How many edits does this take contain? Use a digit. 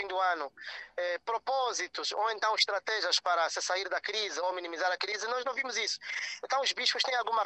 0